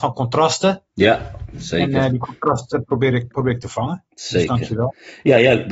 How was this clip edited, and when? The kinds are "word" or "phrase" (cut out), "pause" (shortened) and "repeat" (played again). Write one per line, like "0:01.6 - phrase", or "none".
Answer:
0:03.3 - word